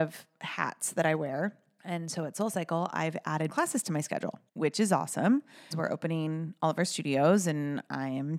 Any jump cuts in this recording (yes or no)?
yes